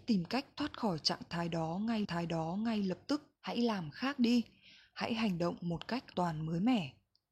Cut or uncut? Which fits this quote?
cut